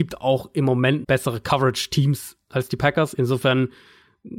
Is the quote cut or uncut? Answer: cut